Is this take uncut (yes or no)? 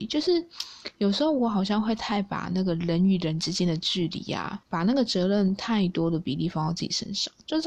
no